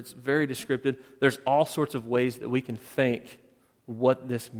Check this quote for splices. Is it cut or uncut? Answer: uncut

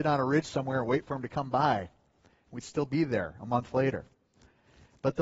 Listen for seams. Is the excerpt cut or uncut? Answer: uncut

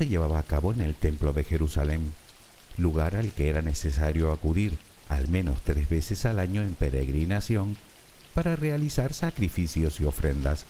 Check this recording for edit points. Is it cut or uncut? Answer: uncut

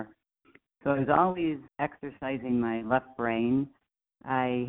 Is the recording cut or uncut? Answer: cut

